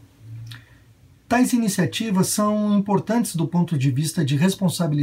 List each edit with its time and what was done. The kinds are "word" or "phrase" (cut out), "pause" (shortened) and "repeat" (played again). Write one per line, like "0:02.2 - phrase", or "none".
none